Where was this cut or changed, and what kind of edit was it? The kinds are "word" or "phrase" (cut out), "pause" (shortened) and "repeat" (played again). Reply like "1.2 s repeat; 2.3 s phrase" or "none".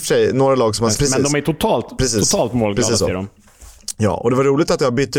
1.0 s phrase